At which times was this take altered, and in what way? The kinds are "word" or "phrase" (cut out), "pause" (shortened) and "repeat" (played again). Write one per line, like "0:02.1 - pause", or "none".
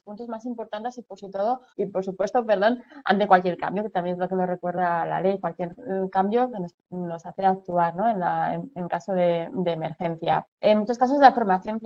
0:01.7 - pause
0:10.5 - pause